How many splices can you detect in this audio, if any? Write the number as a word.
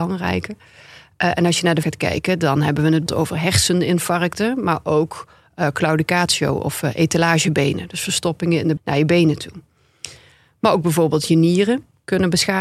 three